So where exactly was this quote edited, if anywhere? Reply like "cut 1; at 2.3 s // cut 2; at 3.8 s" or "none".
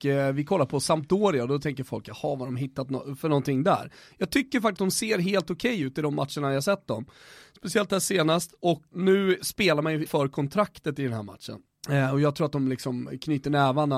cut 1; at 4.8 s // cut 2; at 8.9 s // cut 3; at 10.1 s